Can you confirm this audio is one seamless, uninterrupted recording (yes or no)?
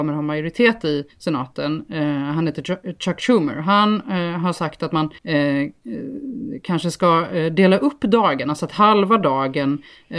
no